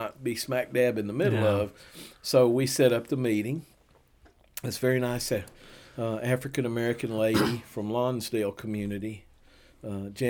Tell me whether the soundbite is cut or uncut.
uncut